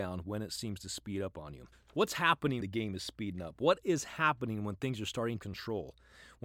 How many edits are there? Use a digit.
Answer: 3